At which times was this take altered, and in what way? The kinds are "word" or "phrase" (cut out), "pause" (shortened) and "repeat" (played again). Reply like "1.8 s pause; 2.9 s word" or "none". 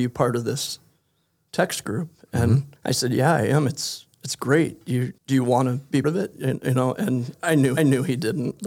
2.8 s pause; 5.2 s pause; 6.0 s word; 7.3 s word; 7.8 s repeat